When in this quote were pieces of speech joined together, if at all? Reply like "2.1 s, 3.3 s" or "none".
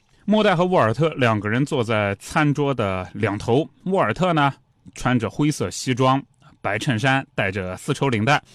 none